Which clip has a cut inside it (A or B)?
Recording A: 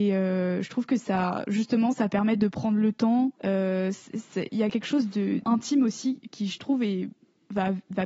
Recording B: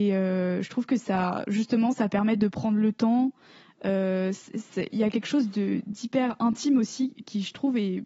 A